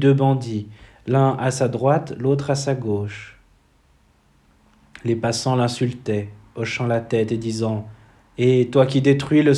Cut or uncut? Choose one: uncut